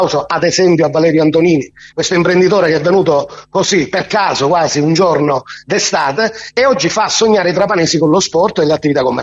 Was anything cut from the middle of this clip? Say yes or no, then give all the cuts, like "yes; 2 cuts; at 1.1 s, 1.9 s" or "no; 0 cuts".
yes; 1 cut; at 1.9 s